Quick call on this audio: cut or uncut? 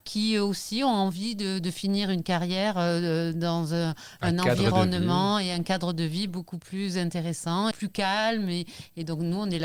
cut